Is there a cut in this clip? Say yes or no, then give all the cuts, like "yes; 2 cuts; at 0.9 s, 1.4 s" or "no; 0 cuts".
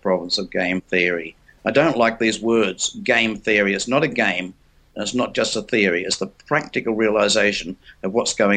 no; 0 cuts